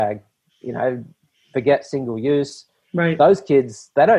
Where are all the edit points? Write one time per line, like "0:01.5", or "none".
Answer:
none